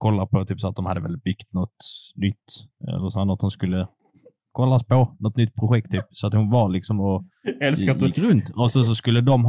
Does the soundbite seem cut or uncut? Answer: uncut